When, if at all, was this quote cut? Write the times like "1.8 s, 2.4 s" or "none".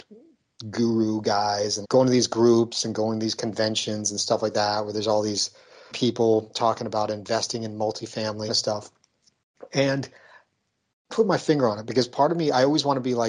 1.8 s, 5.9 s, 8.5 s, 11.1 s